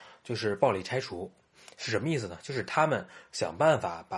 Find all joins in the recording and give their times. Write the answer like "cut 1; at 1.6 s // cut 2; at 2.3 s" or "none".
none